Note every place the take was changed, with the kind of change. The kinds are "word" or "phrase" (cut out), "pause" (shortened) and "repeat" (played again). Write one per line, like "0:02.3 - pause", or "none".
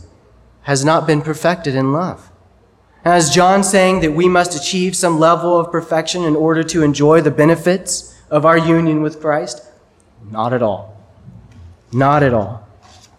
none